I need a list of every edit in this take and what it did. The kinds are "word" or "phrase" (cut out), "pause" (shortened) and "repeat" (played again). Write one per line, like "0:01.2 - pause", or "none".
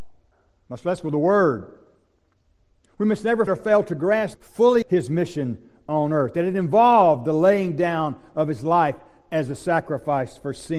0:03.5 - word
0:04.3 - phrase
0:04.8 - word